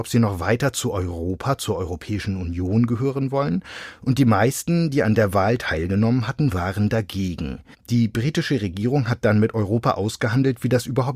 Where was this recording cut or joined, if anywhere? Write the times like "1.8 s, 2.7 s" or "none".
7.7 s